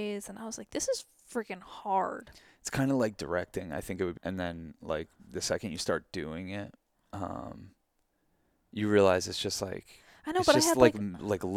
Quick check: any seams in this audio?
yes; 1 cut; at 4.2 s

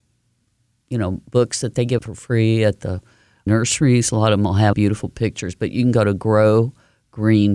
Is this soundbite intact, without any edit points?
no; 3 cuts; at 2.0 s, 3.5 s, 4.7 s

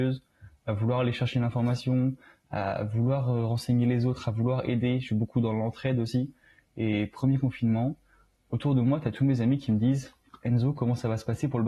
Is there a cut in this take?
no; 0 cuts

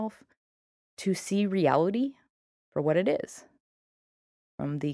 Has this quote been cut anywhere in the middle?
no; 0 cuts

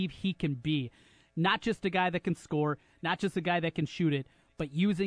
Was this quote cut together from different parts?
no; 0 cuts

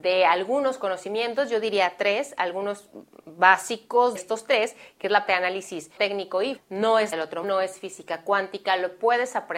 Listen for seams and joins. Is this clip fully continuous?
no; 6 cuts; at 4.2 s, 5.3 s, 6.0 s, 6.6 s, 7.1 s, 7.4 s

